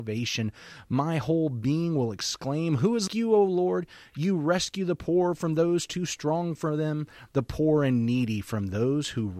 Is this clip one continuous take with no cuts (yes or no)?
no